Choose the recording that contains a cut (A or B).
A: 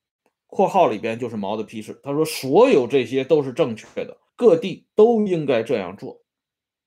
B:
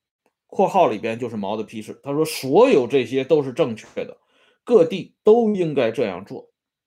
A